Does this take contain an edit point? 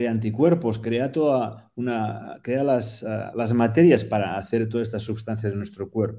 no; 0 cuts

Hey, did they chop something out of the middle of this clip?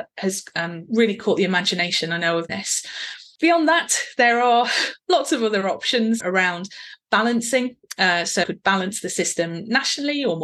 yes; 3 cuts; at 2.5 s, 6.2 s, 8.4 s

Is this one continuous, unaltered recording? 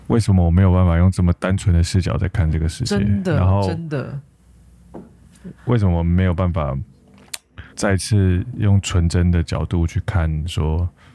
no; 2 cuts; at 5.6 s, 7.7 s

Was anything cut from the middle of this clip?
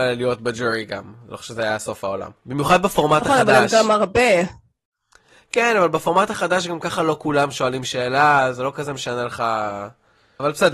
yes; 1 cut; at 2.4 s

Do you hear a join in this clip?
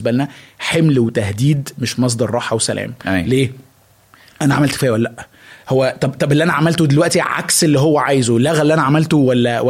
no; 0 cuts

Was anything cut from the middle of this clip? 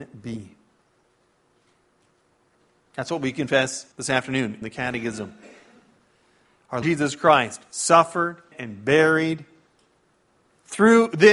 yes; 4 cuts; at 3.9 s, 4.6 s, 6.8 s, 8.5 s

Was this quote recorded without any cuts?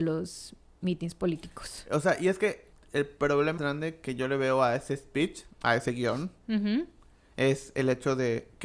no; 3 cuts; at 2.7 s, 3.6 s, 5.5 s

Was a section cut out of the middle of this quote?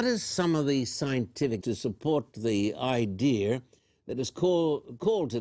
yes; 1 cut; at 1.6 s

